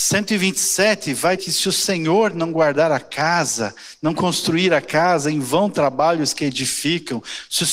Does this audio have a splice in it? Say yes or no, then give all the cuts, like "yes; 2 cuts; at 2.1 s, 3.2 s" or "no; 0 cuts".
yes; 1 cut; at 1.4 s